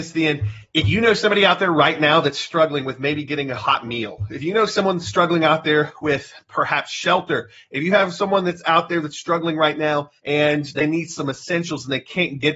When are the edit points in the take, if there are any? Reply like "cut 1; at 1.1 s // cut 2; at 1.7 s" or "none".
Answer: cut 1; at 10.2 s